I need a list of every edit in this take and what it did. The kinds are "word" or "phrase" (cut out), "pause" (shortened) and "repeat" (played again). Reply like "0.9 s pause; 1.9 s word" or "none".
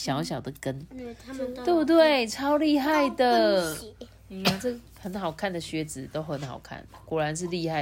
none